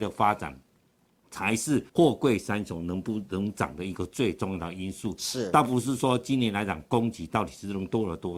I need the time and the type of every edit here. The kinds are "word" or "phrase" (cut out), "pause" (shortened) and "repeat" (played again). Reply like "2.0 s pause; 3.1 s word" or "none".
1.9 s pause